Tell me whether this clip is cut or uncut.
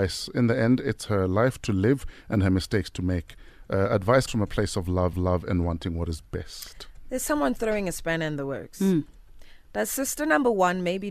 cut